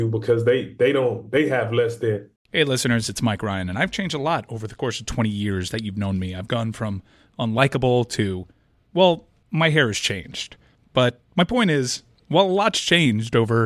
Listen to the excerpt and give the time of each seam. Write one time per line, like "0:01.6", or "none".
0:02.4